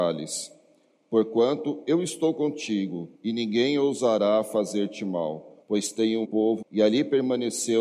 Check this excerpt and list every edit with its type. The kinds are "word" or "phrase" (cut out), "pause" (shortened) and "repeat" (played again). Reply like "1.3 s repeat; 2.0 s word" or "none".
3.1 s pause; 5.6 s pause; 6.2 s word; 6.6 s phrase